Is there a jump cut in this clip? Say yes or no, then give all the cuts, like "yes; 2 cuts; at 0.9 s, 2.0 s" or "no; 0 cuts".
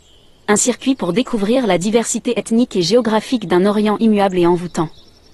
no; 0 cuts